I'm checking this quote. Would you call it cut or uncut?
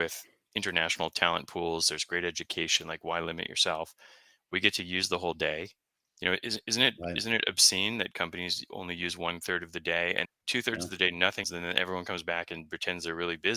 cut